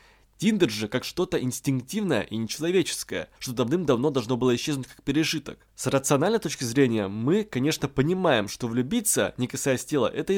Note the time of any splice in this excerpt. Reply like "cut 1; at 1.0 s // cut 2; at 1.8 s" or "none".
cut 1; at 3.4 s // cut 2; at 5.7 s